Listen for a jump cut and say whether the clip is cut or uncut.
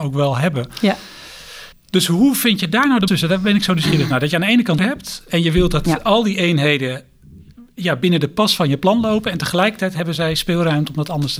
cut